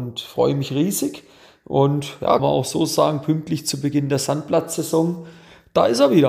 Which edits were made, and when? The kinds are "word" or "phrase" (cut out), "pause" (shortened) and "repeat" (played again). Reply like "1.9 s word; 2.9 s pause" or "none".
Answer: 2.4 s word